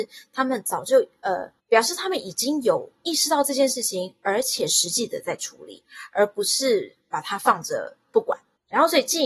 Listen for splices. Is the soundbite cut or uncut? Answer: cut